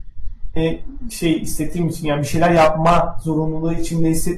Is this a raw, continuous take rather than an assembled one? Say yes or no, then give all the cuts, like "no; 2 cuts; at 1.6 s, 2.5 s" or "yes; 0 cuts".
yes; 0 cuts